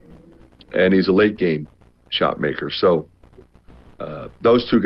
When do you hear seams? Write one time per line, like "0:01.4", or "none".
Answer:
none